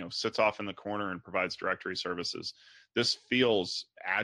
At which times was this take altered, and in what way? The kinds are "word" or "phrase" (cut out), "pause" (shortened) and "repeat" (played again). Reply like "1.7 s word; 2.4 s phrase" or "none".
none